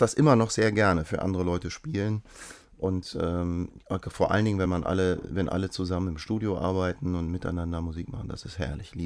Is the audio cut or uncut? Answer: uncut